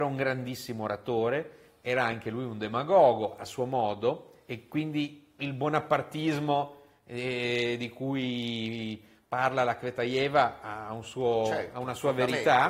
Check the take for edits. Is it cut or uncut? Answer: uncut